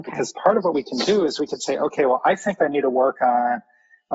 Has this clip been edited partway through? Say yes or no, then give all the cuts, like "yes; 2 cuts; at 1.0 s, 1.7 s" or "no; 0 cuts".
no; 0 cuts